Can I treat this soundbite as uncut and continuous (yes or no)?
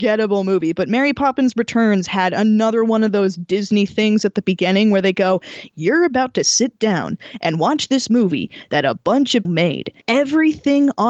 no